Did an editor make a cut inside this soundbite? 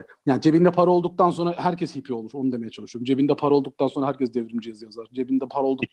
no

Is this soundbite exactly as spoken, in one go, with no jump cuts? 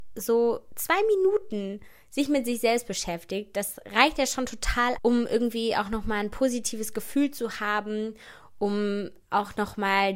no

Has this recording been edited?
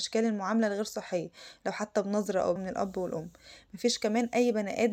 yes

